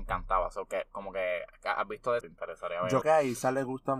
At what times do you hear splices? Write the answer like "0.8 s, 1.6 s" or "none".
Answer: 2.2 s, 3.0 s